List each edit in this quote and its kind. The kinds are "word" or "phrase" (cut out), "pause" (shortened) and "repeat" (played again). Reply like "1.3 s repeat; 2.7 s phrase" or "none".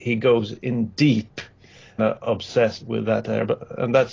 2.0 s phrase; 2.8 s word

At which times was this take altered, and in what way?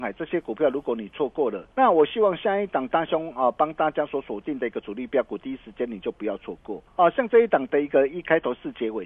1.7 s pause; 6.9 s pause

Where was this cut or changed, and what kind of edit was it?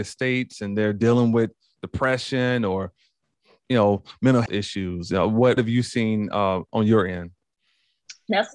4.5 s word; 5.6 s word

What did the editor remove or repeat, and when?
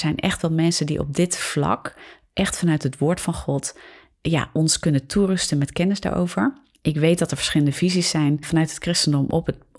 8.4 s word

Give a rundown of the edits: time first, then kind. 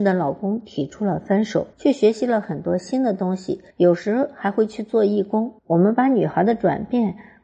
1.7 s pause; 3.7 s pause; 5.6 s pause

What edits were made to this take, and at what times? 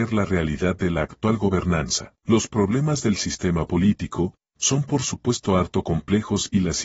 2.2 s pause

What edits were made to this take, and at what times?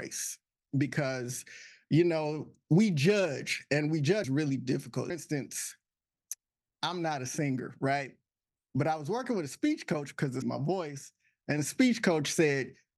4.2 s word; 5.1 s phrase; 10.4 s phrase

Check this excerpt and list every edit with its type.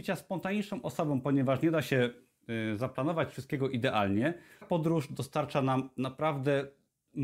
4.6 s word

